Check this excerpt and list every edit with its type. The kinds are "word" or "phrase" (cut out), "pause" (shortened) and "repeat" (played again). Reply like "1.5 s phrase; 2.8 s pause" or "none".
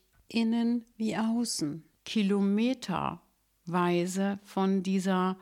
none